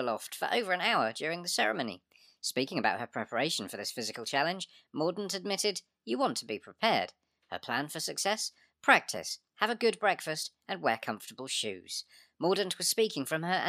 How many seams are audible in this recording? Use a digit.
0